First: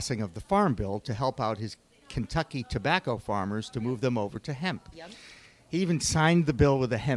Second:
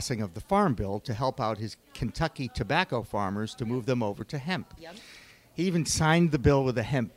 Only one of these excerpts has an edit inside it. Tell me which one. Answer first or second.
second